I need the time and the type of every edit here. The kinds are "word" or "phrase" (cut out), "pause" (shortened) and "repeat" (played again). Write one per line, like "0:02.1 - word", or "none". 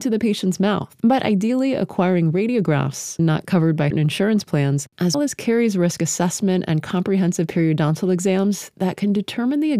0:03.2 - word
0:03.9 - word
0:05.1 - word